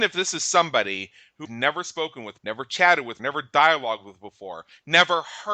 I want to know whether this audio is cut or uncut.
cut